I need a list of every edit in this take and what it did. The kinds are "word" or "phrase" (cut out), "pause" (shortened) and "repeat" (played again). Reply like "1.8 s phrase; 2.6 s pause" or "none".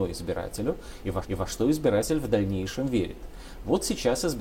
1.2 s repeat